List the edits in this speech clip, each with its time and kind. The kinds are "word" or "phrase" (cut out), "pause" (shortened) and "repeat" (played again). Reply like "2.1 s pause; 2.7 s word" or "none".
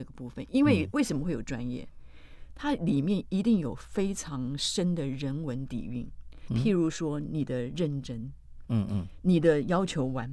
6.5 s word